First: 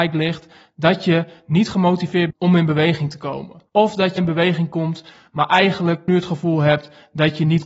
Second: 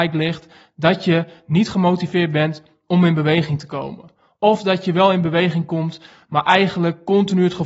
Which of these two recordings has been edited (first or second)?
first